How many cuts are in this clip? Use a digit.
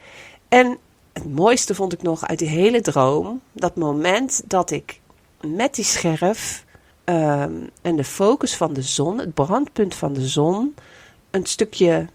2